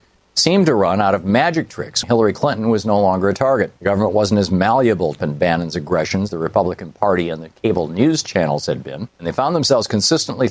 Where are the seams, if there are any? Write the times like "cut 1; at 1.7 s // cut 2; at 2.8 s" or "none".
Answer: cut 1; at 2.0 s // cut 2; at 3.8 s // cut 3; at 5.2 s // cut 4; at 6.3 s